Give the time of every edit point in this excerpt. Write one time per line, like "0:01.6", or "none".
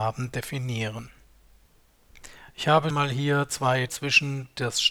0:02.9
0:03.9

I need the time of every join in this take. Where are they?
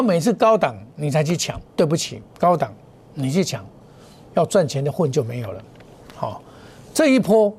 0:01.7
0:02.3

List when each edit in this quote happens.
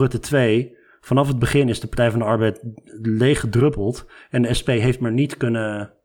none

